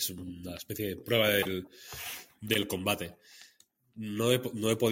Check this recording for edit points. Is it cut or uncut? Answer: cut